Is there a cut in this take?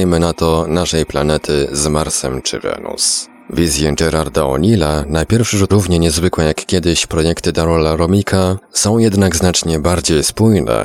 yes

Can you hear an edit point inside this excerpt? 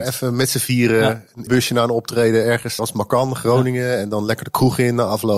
yes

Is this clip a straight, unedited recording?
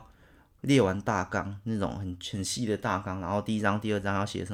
yes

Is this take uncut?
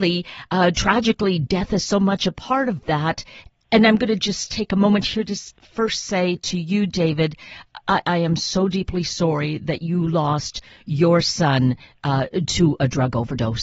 yes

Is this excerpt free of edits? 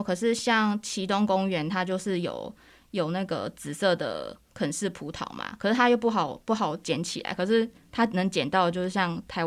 no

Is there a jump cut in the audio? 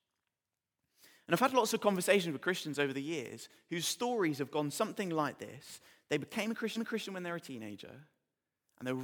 yes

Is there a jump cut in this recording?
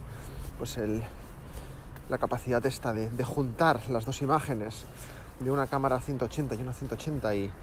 no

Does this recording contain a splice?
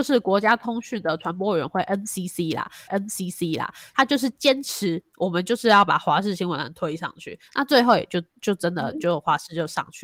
yes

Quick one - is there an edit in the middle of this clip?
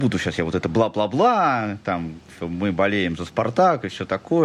no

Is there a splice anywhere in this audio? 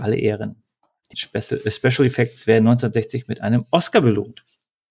yes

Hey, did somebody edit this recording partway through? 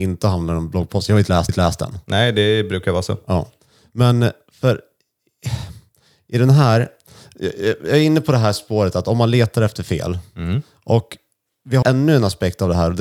yes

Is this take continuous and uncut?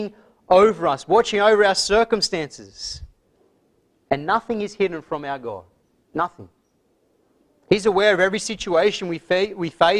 yes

